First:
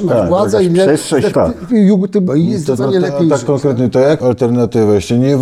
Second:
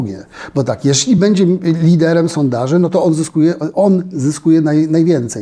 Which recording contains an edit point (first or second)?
first